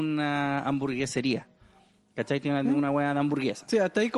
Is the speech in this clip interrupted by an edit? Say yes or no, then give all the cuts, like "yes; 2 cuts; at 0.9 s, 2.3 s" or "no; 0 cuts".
no; 0 cuts